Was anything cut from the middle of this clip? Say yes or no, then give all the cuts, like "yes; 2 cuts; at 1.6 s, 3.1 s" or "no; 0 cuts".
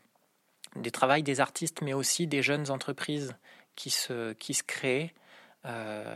no; 0 cuts